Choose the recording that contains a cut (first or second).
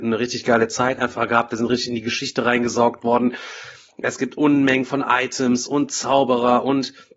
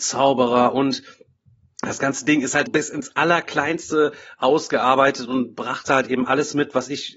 second